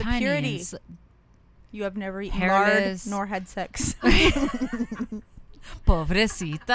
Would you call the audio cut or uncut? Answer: uncut